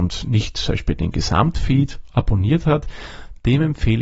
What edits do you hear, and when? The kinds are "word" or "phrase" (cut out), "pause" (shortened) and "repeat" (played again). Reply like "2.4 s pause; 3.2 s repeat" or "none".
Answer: none